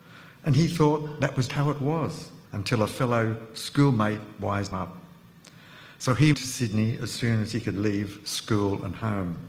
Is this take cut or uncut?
cut